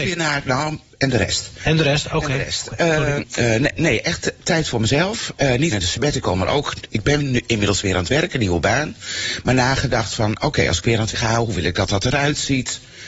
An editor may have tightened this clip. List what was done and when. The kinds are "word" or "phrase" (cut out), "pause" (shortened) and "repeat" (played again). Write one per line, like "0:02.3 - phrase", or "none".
0:03.2 - word
0:05.7 - word
0:11.1 - word